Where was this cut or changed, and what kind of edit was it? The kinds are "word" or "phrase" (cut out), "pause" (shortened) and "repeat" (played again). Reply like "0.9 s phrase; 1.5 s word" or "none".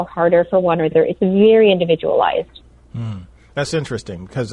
0.9 s word